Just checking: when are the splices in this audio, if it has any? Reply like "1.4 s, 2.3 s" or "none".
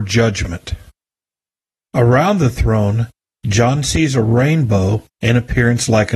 none